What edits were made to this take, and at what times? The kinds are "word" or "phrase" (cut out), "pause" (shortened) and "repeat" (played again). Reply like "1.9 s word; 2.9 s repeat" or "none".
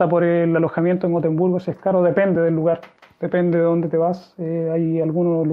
none